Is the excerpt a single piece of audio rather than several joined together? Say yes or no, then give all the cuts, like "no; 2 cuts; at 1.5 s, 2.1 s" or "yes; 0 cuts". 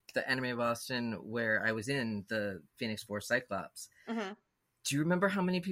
yes; 0 cuts